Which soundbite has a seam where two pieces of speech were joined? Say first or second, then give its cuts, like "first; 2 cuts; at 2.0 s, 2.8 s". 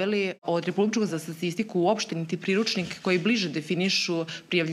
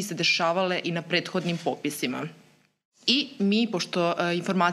first; 2 cuts; at 1.1 s, 2.1 s